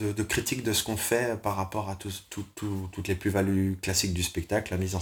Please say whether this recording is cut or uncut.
uncut